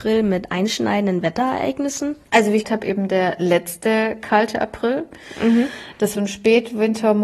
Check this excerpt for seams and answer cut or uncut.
cut